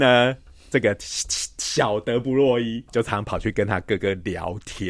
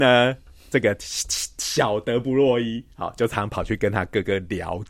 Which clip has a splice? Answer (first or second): first